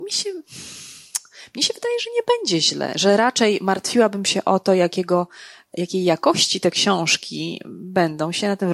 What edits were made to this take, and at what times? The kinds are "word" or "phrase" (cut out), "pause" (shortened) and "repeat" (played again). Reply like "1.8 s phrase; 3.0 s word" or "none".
none

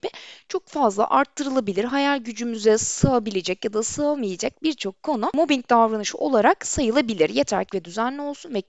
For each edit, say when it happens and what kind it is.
7.7 s word

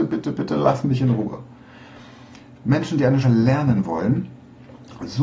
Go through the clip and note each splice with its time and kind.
3.2 s word

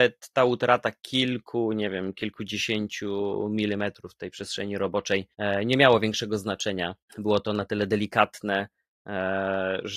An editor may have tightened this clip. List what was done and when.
5.3 s pause; 7.0 s pause

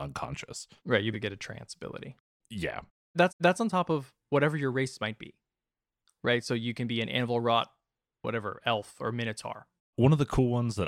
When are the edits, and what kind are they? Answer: 1.1 s word; 3.3 s repeat; 9.8 s pause

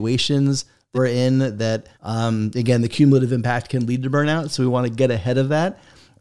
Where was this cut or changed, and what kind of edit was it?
0.9 s word; 1.9 s pause

